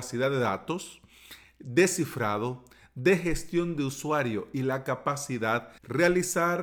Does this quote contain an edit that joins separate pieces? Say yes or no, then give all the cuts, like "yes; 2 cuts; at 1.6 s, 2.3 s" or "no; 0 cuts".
no; 0 cuts